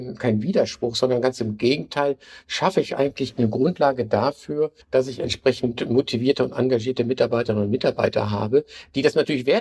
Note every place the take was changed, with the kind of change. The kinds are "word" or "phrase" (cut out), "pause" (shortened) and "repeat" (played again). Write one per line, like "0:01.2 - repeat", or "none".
0:04.8 - pause

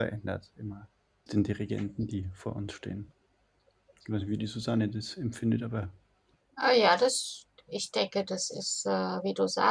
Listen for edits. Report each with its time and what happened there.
0:01.3 - word

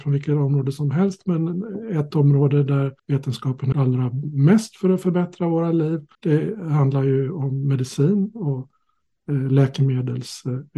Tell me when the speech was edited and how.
0:03.0 - pause
0:03.7 - word
0:06.1 - pause

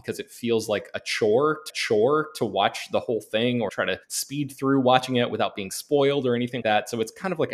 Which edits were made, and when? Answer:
0:01.7 - repeat
0:03.7 - word
0:04.0 - pause
0:06.6 - word

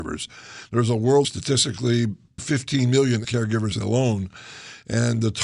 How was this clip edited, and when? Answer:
0:01.2 - phrase
0:02.4 - word
0:03.2 - word
0:03.8 - phrase

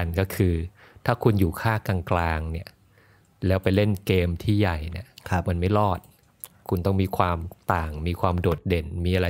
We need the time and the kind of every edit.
none

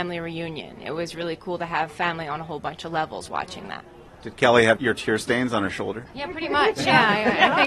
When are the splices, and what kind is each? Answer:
none

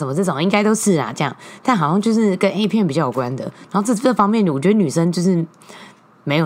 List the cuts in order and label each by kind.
none

